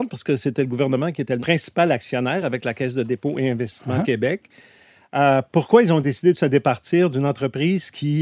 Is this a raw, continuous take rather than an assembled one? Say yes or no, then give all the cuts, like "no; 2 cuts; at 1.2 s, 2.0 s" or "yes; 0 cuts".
yes; 0 cuts